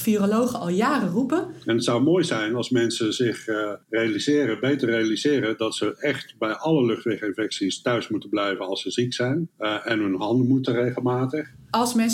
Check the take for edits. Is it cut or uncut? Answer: cut